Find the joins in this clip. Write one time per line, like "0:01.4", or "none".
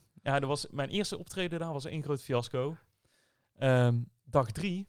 none